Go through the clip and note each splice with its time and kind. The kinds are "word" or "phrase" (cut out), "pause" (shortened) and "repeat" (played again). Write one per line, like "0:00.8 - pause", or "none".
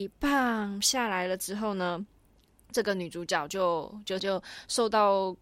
0:04.2 - word